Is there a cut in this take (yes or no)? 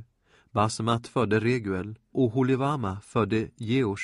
yes